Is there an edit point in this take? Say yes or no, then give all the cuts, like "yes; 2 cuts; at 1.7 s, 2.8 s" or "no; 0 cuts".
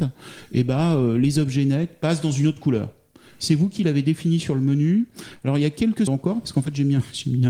yes; 1 cut; at 6.1 s